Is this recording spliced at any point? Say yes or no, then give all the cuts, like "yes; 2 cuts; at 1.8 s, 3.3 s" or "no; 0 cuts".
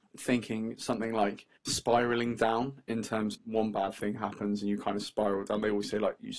yes; 2 cuts; at 1.6 s, 3.3 s